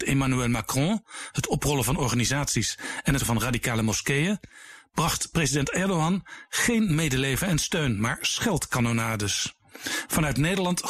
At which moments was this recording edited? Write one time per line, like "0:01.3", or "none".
0:03.2